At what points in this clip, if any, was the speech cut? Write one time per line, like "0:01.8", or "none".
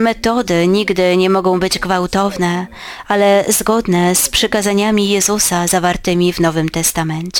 none